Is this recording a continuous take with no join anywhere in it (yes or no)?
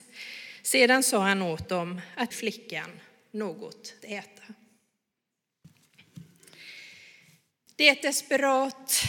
no